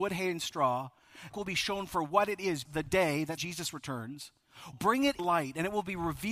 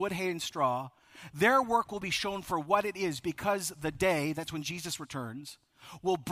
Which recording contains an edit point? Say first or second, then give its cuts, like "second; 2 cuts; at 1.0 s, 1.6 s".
first; 5 cuts; at 1.3 s, 2.7 s, 3.4 s, 4.7 s, 5.2 s